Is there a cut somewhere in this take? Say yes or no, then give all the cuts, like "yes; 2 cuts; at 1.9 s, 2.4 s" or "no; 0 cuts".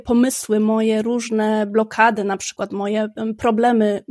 no; 0 cuts